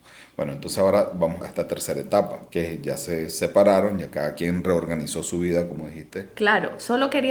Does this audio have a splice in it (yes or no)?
no